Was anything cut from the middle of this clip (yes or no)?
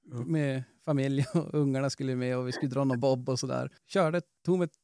yes